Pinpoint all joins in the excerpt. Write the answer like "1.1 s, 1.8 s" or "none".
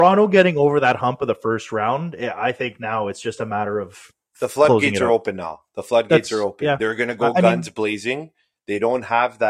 none